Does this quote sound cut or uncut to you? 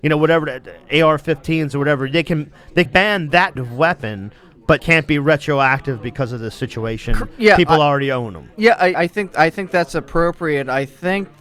cut